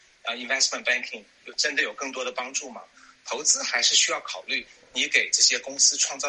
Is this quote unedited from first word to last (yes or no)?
yes